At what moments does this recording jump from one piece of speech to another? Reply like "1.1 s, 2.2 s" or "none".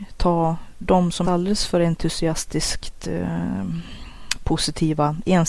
1.2 s